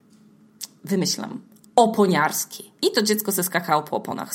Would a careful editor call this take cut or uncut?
cut